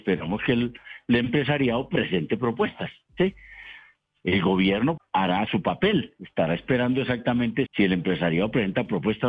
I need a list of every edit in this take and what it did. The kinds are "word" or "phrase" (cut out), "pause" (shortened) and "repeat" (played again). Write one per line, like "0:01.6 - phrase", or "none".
0:05.0 - word
0:05.5 - word
0:07.7 - word